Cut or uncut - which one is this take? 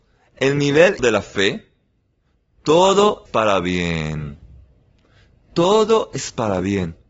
cut